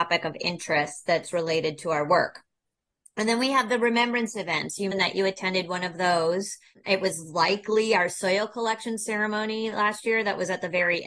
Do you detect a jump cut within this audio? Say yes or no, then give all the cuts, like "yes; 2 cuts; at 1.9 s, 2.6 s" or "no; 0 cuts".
yes; 1 cut; at 4.9 s